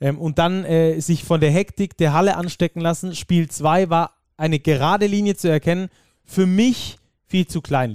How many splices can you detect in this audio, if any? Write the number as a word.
zero